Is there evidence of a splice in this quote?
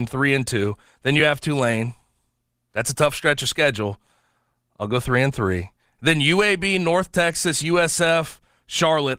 no; 0 cuts

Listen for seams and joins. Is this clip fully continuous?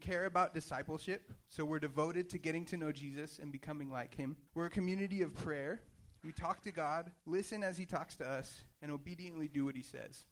no; 4 cuts; at 1.4 s, 4.5 s, 7.2 s, 8.7 s

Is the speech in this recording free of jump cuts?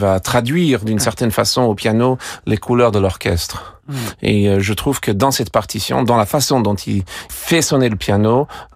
yes; 0 cuts

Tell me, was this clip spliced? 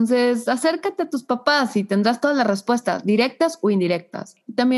no; 0 cuts

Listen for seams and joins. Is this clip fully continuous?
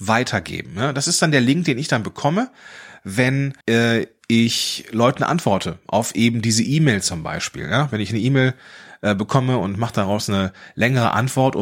no; 1 cut; at 3.6 s

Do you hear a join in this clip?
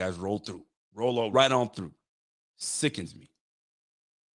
yes; 1 cut; at 1.3 s

